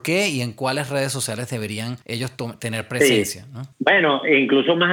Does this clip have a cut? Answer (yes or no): yes